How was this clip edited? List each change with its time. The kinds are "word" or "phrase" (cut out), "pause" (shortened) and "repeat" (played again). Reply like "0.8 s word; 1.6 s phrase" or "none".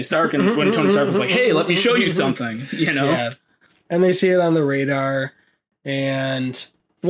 none